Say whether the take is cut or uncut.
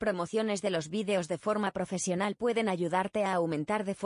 uncut